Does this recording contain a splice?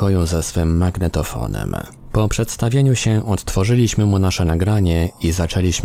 no; 0 cuts

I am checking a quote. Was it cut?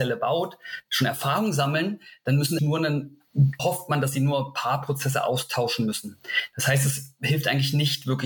yes; 2 cuts; at 2.6 s, 3.6 s

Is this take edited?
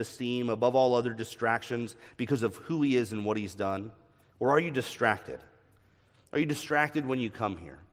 no; 0 cuts

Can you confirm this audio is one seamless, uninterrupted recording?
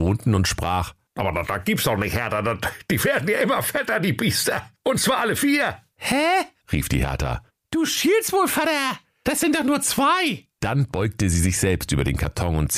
yes; 0 cuts

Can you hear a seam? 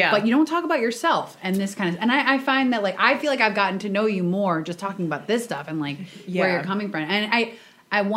no; 0 cuts

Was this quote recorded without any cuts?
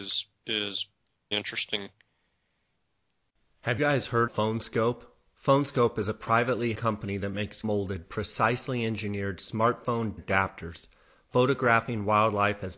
no; 6 cuts; at 1.3 s, 3.8 s, 4.3 s, 6.7 s, 7.6 s, 10.2 s

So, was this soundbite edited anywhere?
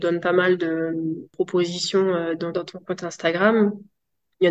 yes; 1 cut; at 2.5 s

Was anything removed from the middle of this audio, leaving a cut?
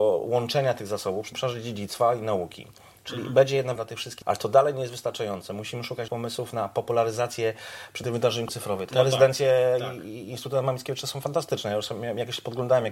yes; 7 cuts; at 1.3 s, 3.8 s, 4.2 s, 6.1 s, 8.0 s, 8.5 s, 8.9 s

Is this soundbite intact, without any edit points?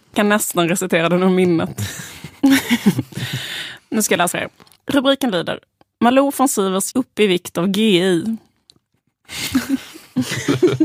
no; 2 cuts; at 4.3 s, 6.9 s

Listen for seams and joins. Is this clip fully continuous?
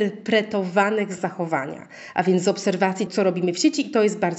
no; 2 cuts; at 1.2 s, 3.1 s

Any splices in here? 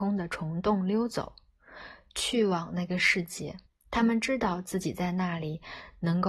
yes; 1 cut; at 3.7 s

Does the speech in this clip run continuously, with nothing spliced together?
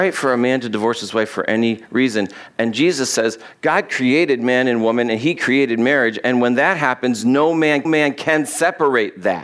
no; 1 cut; at 7.8 s

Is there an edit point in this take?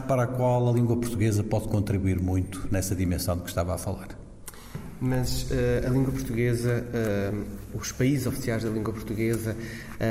no; 0 cuts

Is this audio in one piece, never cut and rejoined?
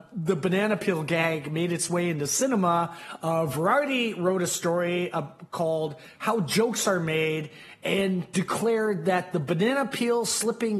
yes; 0 cuts

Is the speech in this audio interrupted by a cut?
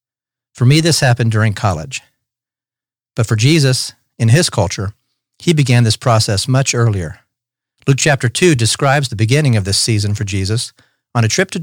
no; 0 cuts

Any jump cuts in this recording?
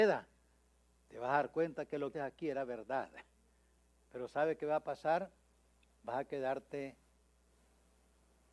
yes; 1 cut; at 2.1 s

